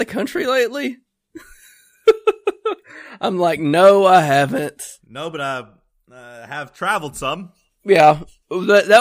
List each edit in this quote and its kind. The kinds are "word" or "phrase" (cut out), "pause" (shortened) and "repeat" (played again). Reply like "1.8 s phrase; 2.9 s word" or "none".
5.0 s pause